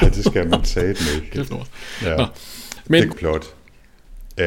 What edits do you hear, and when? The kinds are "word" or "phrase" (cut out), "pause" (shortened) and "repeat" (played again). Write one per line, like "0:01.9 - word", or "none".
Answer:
0:01.5 - word
0:03.1 - word